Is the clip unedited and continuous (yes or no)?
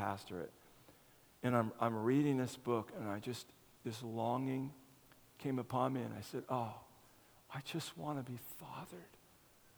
yes